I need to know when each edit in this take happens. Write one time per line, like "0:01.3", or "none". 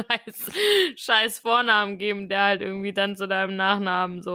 none